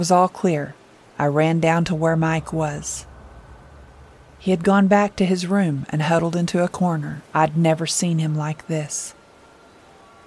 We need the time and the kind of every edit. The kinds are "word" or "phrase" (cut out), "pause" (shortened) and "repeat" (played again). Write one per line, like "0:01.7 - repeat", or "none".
0:07.3 - pause